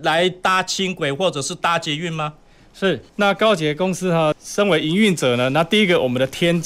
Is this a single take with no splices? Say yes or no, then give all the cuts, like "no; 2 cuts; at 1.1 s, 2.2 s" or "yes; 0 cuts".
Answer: no; 2 cuts; at 3.1 s, 4.3 s